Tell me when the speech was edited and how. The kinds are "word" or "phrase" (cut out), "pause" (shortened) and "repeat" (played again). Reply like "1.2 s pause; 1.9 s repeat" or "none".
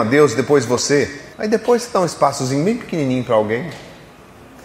1.3 s pause

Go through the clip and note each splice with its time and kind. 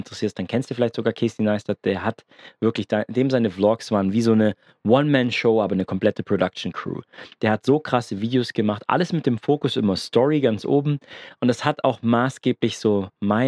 none

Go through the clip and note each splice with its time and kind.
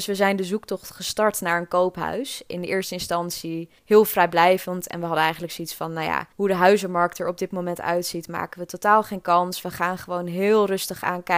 3.8 s pause; 6.3 s pause

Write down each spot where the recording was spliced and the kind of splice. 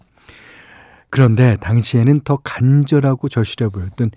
none

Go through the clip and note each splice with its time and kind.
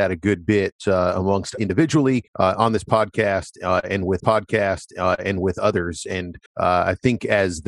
1.6 s word; 2.3 s pause; 4.2 s repeat; 6.5 s pause

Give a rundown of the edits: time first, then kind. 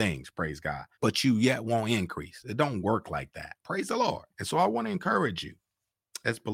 0.9 s pause; 3.6 s pause; 4.3 s pause

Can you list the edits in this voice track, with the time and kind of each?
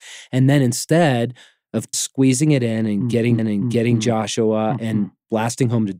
1.9 s word; 3.4 s repeat

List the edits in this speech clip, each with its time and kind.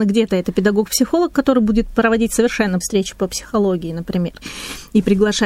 2.8 s word

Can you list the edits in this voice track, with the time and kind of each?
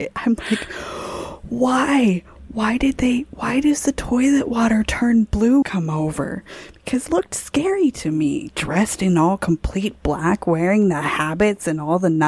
5.6 s phrase; 7.1 s word

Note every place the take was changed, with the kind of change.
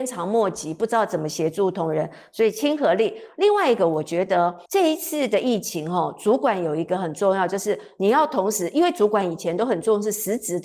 4.7 s pause

